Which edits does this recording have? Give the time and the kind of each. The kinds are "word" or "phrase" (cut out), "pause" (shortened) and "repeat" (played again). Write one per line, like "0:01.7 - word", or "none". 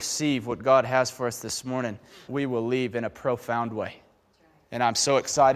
0:02.2 - word